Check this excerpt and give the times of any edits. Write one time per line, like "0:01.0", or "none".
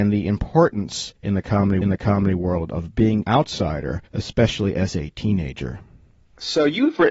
0:01.1
0:01.8
0:03.2
0:04.1
0:04.9